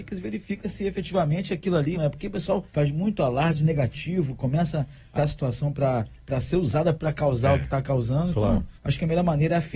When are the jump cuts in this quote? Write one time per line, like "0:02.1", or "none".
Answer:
0:01.9
0:02.7
0:05.2
0:06.9
0:08.8

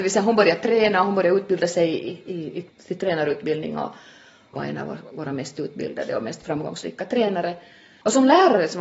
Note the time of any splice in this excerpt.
none

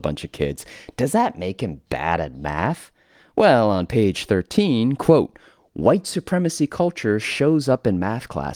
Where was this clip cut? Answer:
none

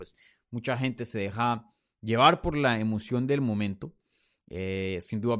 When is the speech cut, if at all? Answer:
none

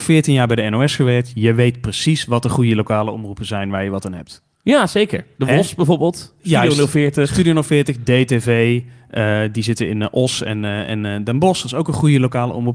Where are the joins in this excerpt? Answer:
none

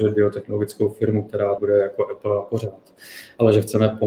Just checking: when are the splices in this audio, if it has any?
0:01.6

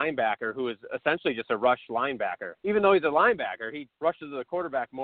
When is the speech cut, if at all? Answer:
0:02.5
0:03.9

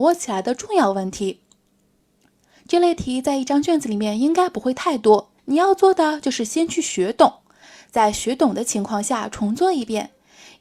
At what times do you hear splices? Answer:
0:05.4

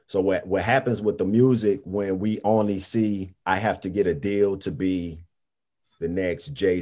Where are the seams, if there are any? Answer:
0:03.4

